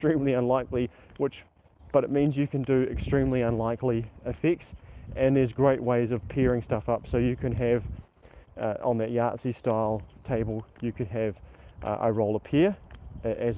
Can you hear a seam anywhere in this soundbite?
no; 0 cuts

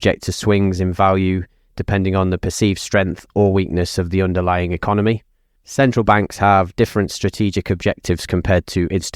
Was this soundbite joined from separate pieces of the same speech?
no; 0 cuts

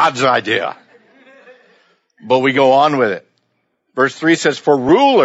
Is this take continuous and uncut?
yes; 0 cuts

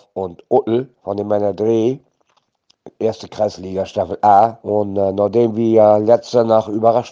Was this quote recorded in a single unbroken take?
no; 2 cuts; at 1.0 s, 4.6 s

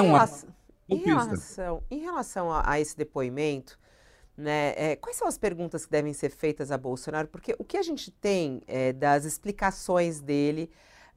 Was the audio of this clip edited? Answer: no; 0 cuts

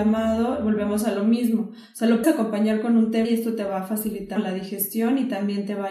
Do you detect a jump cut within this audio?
yes; 3 cuts; at 2.2 s, 3.2 s, 4.4 s

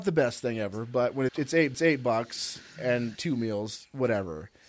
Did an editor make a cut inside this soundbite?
yes; 3 cuts; at 1.3 s, 1.7 s, 3.2 s

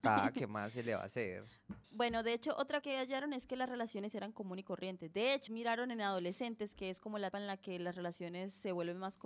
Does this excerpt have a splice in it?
yes; 5 cuts; at 1.8 s, 2.8 s, 4.1 s, 5.5 s, 7.3 s

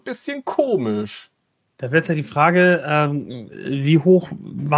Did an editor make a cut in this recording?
no; 0 cuts

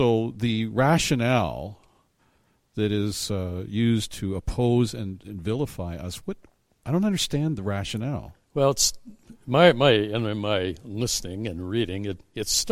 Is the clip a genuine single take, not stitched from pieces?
yes; 0 cuts

